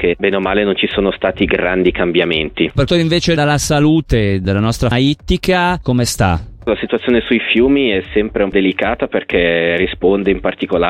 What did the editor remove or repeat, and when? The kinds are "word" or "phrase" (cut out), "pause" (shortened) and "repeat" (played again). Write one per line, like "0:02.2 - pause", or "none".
0:02.9 - word
0:03.4 - word
0:04.9 - word
0:08.5 - word